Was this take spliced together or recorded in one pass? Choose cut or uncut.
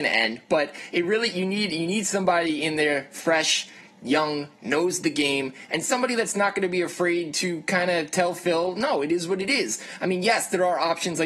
uncut